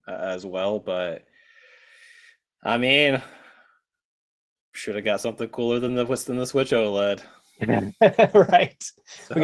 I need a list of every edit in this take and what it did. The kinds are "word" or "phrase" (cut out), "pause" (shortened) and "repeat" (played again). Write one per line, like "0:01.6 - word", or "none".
none